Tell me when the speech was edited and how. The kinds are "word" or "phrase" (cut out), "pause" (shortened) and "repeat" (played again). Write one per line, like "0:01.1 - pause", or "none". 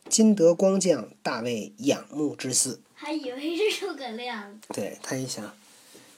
0:02.8 - pause
0:04.7 - pause